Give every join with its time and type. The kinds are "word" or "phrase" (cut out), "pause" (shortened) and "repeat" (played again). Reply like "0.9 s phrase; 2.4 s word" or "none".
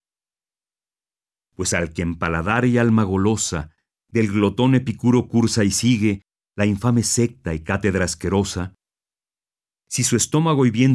none